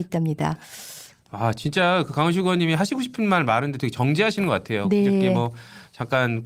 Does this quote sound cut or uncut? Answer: uncut